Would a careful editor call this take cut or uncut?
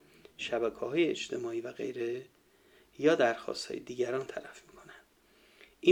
uncut